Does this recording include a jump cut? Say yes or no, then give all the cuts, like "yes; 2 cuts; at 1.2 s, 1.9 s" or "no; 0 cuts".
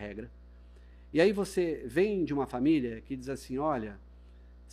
no; 0 cuts